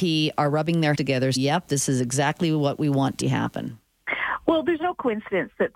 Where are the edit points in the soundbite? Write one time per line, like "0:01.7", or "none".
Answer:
0:00.9
0:01.4
0:03.2